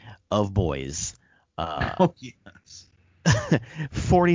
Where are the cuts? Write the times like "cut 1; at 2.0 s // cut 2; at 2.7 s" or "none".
none